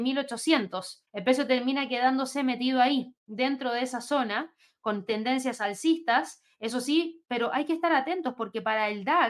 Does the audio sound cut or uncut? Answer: cut